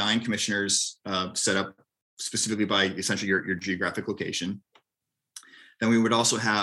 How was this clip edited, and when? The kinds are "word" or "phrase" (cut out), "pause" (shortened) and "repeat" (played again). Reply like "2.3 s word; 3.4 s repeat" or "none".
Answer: none